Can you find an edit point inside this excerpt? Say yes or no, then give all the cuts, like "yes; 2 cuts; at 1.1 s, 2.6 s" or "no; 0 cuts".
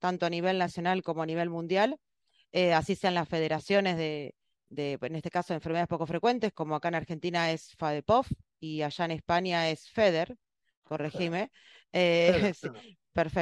no; 0 cuts